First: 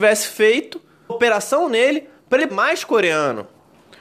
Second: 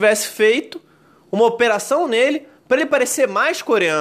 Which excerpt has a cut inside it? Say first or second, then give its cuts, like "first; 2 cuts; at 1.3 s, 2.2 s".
first; 2 cuts; at 1.1 s, 2.5 s